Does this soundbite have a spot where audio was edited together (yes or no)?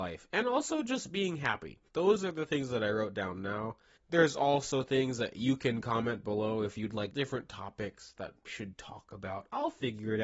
yes